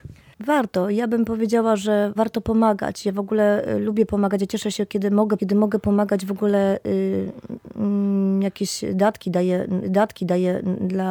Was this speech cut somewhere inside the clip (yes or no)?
yes